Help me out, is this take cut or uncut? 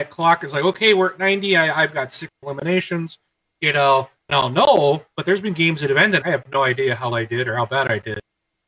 cut